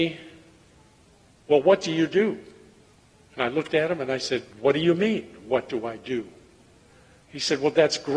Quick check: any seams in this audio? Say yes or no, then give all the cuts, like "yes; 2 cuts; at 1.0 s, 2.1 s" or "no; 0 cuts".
yes; 2 cuts; at 2.9 s, 4.5 s